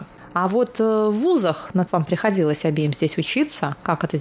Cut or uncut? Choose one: cut